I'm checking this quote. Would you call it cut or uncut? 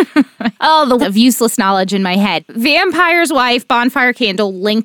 cut